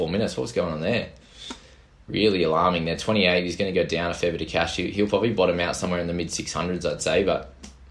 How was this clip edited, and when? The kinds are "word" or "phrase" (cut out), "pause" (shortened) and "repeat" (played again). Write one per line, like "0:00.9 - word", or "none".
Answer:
none